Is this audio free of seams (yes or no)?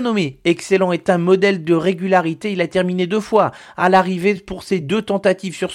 yes